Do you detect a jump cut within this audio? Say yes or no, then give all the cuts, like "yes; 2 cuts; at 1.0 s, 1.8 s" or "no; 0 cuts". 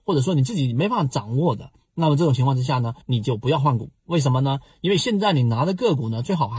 yes; 1 cut; at 3.0 s